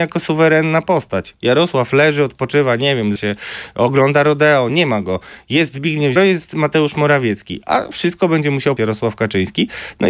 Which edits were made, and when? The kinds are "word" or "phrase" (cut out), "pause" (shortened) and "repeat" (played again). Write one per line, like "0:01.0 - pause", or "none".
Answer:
0:03.2 - word
0:04.7 - word
0:06.2 - word
0:08.8 - word